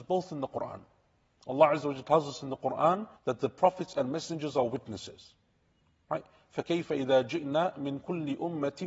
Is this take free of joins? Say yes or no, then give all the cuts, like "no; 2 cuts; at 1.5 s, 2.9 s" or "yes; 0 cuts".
no; 1 cut; at 3.2 s